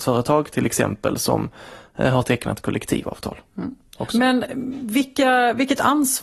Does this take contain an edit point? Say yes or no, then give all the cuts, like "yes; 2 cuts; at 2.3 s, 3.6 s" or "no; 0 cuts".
no; 0 cuts